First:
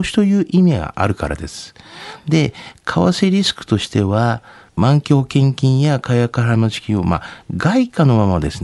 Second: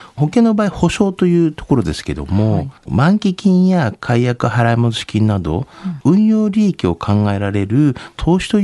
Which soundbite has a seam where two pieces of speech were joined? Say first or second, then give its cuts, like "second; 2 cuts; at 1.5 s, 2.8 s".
second; 1 cut; at 2.8 s